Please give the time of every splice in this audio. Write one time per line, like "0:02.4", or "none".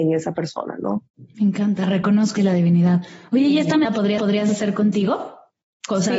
0:01.1
0:02.4
0:03.8
0:04.2